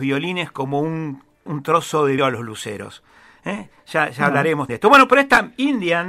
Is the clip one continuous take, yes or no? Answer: no